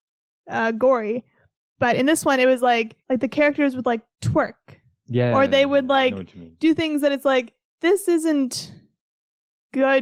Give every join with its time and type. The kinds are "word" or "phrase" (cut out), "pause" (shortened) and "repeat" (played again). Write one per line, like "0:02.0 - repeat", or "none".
0:03.0 - pause